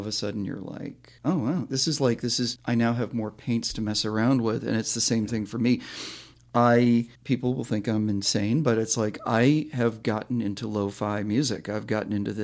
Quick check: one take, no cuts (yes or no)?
no